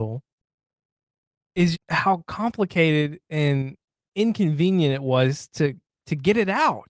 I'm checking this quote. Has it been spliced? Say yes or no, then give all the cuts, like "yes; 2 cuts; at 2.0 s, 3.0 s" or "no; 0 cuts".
yes; 1 cut; at 1.7 s